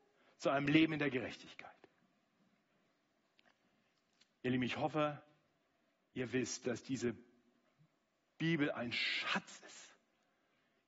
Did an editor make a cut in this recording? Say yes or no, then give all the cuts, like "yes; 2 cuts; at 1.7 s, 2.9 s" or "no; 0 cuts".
no; 0 cuts